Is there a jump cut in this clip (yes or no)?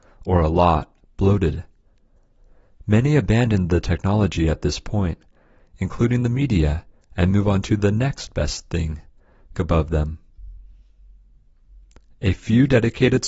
yes